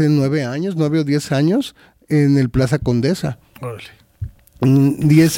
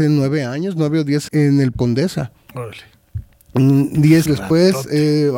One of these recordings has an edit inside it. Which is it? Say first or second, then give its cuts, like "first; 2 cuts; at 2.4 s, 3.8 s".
second; 3 cuts; at 1.3 s, 1.7 s, 4.3 s